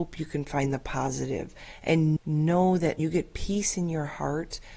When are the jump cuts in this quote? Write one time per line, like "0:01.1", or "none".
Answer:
0:02.2
0:03.0